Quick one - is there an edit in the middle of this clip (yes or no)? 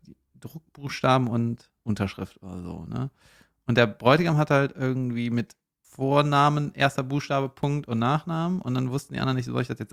yes